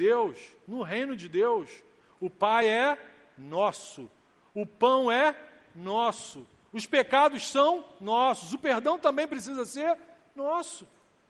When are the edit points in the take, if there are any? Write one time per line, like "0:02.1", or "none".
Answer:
none